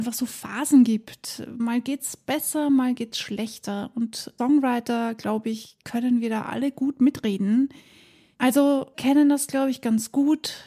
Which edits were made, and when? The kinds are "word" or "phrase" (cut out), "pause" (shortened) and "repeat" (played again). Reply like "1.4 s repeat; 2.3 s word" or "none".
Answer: 4.4 s word; 5.8 s pause; 8.9 s word